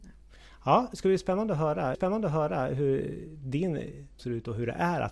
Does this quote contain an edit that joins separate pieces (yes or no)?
yes